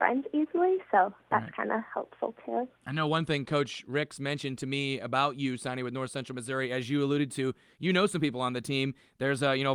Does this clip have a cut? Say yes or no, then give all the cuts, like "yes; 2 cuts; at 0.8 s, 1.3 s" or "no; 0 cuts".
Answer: no; 0 cuts